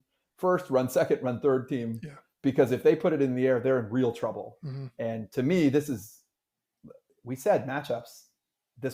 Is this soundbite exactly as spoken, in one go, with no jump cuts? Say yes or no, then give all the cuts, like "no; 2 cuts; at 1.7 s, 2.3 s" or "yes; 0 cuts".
yes; 0 cuts